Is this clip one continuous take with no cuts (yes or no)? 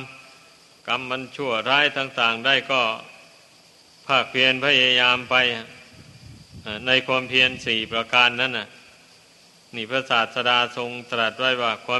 yes